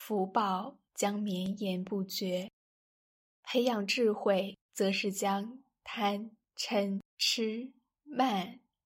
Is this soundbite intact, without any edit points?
no; 2 cuts; at 4.6 s, 7.1 s

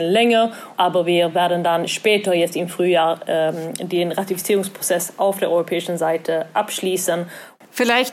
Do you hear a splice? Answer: no; 0 cuts

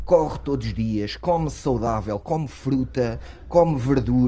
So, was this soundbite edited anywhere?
no; 0 cuts

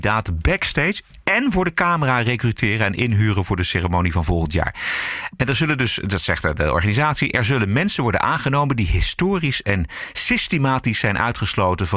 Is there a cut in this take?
no; 0 cuts

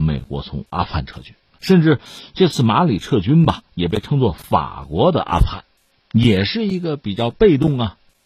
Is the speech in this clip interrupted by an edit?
no; 0 cuts

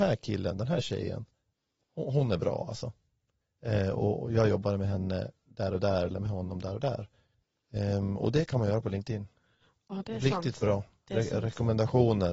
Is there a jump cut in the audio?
no; 0 cuts

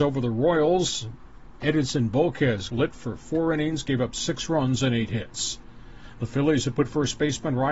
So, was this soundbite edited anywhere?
yes; 1 cut; at 2.7 s

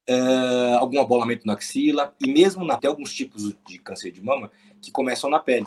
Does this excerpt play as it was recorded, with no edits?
no; 1 cut; at 2.8 s

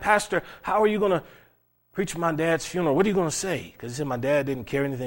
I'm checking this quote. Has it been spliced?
no; 0 cuts

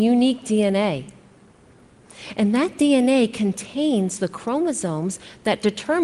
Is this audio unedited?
yes; 0 cuts

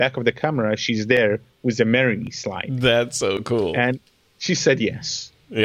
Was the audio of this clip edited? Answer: no; 0 cuts

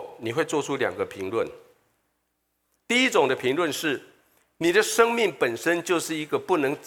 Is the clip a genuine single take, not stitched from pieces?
yes; 0 cuts

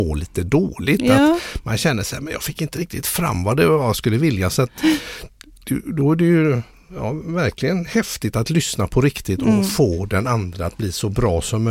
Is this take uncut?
yes; 0 cuts

